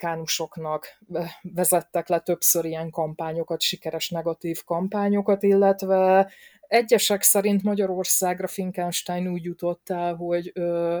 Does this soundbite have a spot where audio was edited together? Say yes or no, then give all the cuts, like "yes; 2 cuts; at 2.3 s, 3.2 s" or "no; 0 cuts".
no; 0 cuts